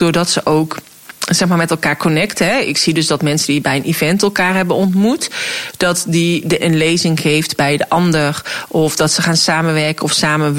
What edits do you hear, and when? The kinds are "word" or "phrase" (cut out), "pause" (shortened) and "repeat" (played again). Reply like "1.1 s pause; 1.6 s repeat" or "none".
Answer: 6.6 s word